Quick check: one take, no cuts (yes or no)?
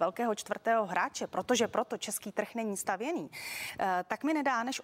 yes